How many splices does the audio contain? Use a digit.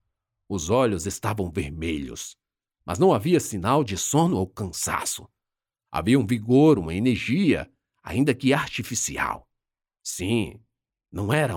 0